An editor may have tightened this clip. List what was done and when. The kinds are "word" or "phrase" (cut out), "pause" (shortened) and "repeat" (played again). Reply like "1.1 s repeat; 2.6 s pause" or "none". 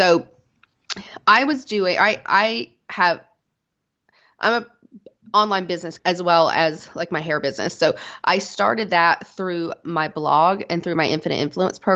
6.0 s word